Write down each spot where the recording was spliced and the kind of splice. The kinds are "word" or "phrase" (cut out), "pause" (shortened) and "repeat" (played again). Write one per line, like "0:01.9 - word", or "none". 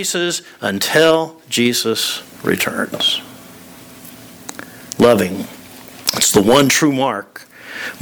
none